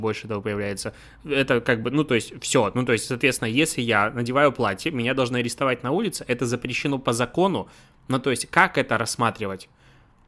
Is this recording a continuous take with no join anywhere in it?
yes; 0 cuts

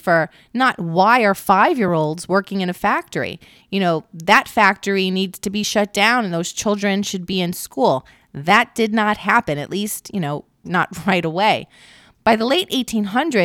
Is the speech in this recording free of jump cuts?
yes; 0 cuts

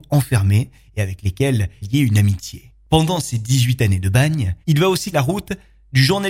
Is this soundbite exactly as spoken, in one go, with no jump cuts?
no; 3 cuts; at 1.8 s, 4.6 s, 5.1 s

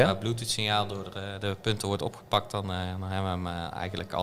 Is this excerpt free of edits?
yes; 0 cuts

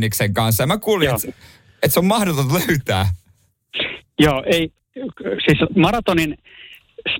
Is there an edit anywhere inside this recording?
no; 0 cuts

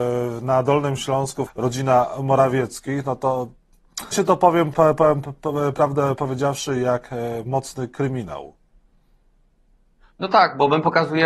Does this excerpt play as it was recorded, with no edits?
no; 3 cuts; at 1.5 s, 4.1 s, 4.7 s

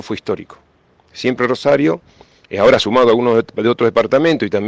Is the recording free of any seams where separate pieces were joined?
yes; 0 cuts

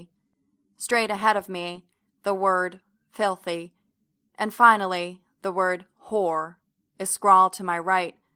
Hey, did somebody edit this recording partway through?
no; 0 cuts

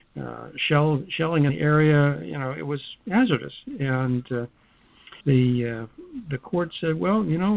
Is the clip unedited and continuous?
no; 2 cuts; at 1.5 s, 5.2 s

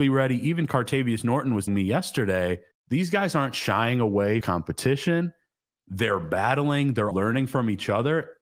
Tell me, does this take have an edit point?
yes; 4 cuts; at 1.7 s, 2.7 s, 4.4 s, 7.1 s

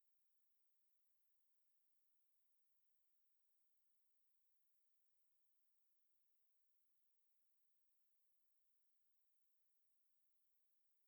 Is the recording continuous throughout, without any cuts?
yes; 0 cuts

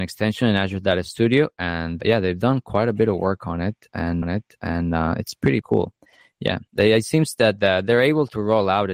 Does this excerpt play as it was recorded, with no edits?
no; 4 cuts; at 2.0 s, 4.2 s, 5.6 s, 6.7 s

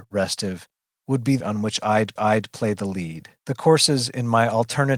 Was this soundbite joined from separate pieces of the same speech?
yes; 3 cuts; at 1.4 s, 2.2 s, 3.4 s

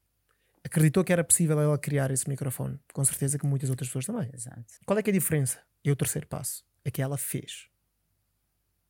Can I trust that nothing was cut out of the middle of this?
no; 1 cut; at 4.8 s

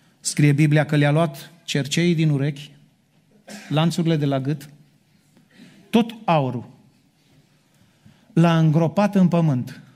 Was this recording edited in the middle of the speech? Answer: no; 0 cuts

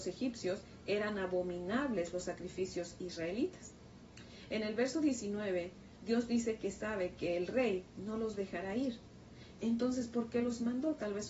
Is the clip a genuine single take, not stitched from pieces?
yes; 0 cuts

